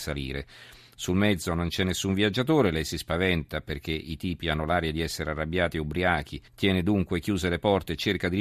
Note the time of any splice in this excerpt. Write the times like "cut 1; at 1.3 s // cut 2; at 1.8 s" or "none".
cut 1; at 6.5 s